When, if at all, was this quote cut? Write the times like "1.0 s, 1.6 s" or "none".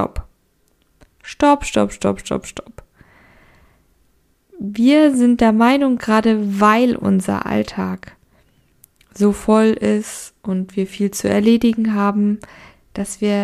none